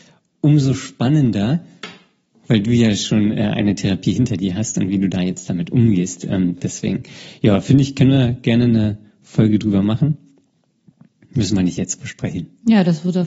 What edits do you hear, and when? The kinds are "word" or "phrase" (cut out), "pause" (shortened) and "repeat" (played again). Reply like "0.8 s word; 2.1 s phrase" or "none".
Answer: none